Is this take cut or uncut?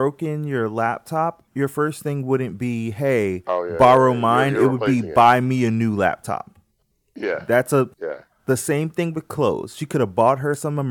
cut